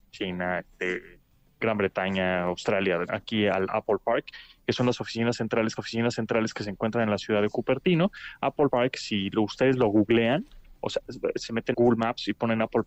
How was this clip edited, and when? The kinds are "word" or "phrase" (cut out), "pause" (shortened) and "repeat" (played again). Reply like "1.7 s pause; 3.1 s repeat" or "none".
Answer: 1.6 s word; 3.1 s phrase; 5.8 s repeat; 11.7 s word

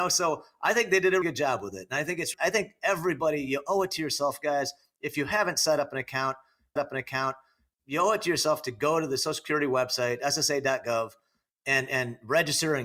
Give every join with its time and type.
1.2 s word; 2.3 s word; 6.8 s repeat

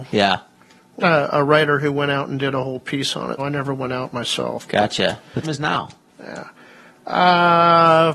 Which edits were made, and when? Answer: 1.0 s word; 3.4 s word; 5.4 s word

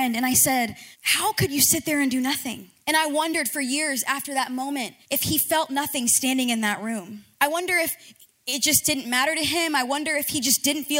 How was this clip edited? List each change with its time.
0.9 s pause; 2.8 s pause; 5.0 s pause; 7.3 s pause

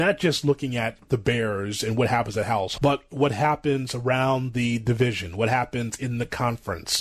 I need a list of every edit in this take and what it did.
2.8 s word

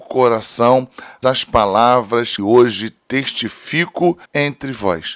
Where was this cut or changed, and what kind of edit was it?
1.2 s phrase; 2.4 s word; 4.2 s pause

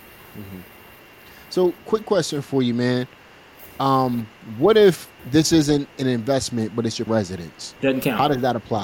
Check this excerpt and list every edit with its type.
5.2 s pause; 7.1 s word; 7.8 s pause

